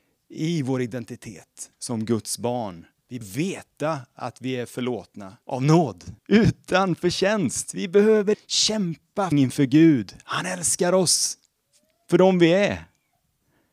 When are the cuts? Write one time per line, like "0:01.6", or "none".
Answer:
0:03.2
0:05.4
0:06.2
0:08.3
0:09.3